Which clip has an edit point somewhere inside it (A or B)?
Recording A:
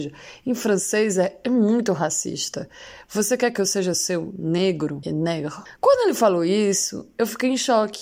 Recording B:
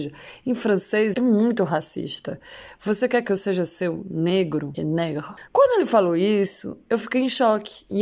B